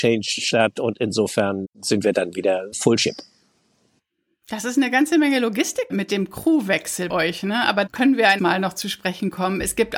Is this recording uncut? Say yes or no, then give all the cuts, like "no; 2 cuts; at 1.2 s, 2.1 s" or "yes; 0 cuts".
no; 6 cuts; at 1.6 s, 2.7 s, 5.9 s, 7.1 s, 7.9 s, 8.4 s